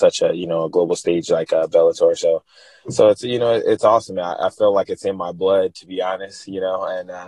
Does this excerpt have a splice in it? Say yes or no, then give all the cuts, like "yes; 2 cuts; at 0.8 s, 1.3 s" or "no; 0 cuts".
no; 0 cuts